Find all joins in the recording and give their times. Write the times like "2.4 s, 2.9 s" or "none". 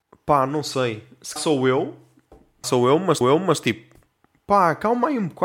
1.4 s, 2.6 s, 3.2 s